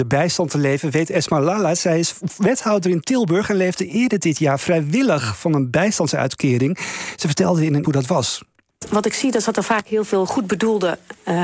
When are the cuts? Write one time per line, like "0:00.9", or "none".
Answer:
0:07.8